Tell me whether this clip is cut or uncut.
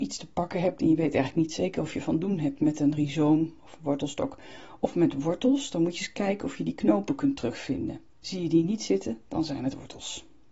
cut